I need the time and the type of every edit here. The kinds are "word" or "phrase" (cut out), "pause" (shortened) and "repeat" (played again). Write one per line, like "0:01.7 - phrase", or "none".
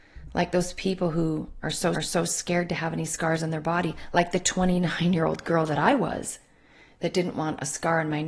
0:01.9 - repeat